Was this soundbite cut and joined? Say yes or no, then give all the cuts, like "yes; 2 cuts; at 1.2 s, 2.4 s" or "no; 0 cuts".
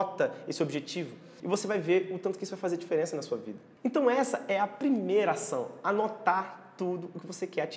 no; 0 cuts